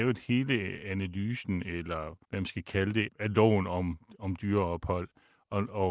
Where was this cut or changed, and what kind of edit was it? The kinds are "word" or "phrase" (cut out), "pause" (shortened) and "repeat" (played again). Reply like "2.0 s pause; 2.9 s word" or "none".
2.2 s pause